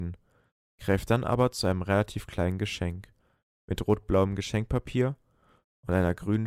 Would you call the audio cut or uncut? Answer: uncut